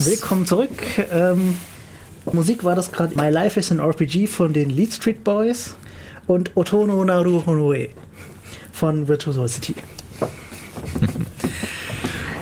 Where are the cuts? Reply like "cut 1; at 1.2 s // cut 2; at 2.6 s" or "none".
cut 1; at 2.3 s // cut 2; at 3.2 s